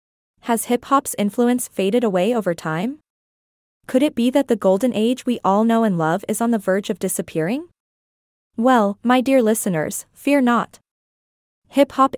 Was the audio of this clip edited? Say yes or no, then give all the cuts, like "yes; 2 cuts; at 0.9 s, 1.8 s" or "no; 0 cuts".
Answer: no; 0 cuts